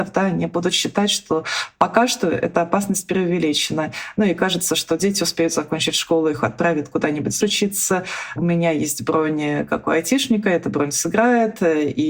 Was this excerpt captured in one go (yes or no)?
no